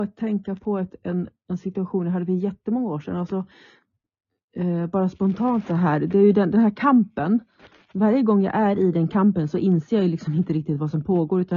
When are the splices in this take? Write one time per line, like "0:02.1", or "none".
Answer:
none